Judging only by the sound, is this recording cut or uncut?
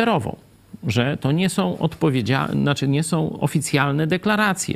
uncut